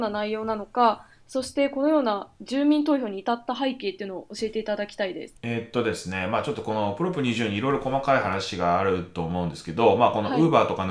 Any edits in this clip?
yes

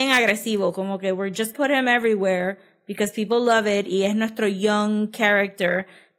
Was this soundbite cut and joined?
yes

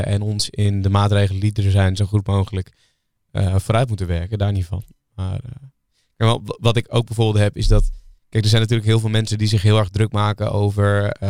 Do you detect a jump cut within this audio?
no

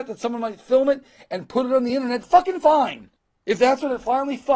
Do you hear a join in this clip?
no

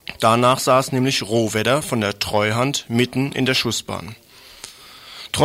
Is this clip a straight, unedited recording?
yes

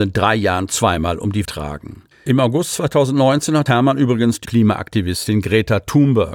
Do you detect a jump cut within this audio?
yes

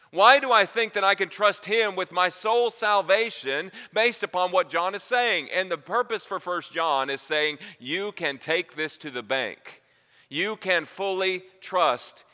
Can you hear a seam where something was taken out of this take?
no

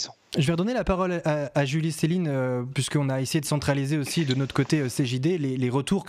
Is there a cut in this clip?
no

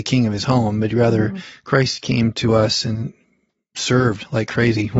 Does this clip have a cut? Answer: no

